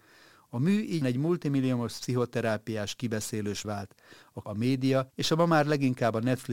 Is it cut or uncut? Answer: cut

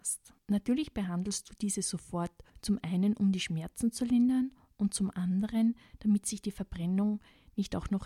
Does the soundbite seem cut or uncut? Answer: uncut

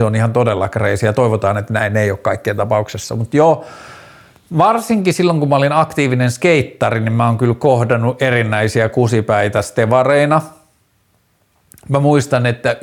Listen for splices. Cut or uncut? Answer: uncut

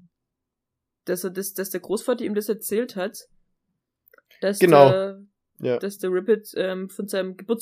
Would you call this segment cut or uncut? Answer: uncut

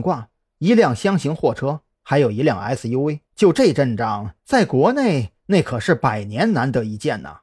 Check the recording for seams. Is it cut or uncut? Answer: cut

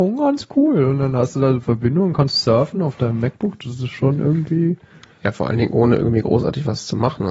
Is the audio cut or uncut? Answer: uncut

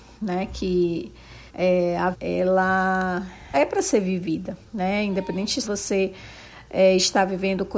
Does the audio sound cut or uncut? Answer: cut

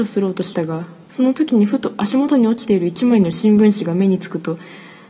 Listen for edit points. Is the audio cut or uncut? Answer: cut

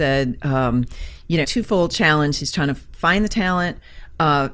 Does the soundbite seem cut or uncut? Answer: cut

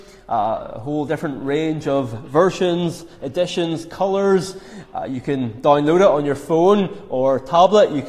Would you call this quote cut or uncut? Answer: uncut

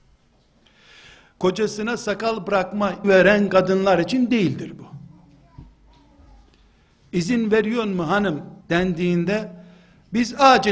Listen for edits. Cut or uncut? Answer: cut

